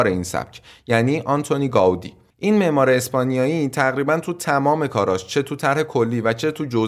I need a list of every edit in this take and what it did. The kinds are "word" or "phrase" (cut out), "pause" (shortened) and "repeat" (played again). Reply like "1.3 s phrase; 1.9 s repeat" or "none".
none